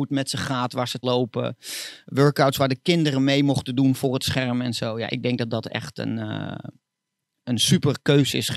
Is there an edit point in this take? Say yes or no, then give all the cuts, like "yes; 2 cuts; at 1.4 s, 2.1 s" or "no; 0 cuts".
yes; 1 cut; at 1.0 s